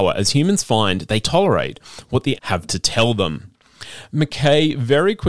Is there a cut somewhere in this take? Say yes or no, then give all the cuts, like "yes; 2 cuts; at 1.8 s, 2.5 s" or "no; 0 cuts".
yes; 2 cuts; at 1.2 s, 2.4 s